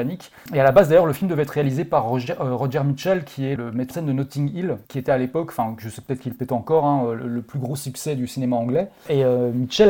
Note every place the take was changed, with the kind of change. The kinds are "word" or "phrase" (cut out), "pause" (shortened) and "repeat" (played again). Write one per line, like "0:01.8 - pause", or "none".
0:03.6 - word
0:03.9 - word
0:04.8 - pause